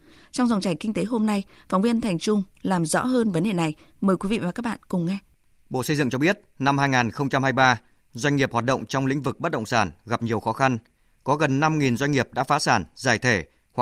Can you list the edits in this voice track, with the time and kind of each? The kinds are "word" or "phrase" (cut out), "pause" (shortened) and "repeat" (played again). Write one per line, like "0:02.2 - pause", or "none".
none